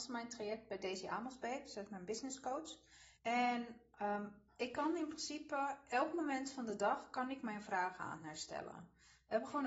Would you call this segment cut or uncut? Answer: cut